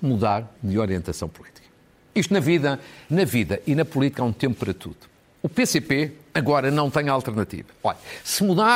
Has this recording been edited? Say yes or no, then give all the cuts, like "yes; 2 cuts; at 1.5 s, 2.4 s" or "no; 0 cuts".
no; 0 cuts